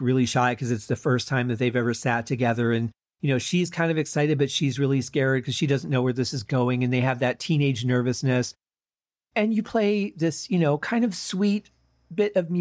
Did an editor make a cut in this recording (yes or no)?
no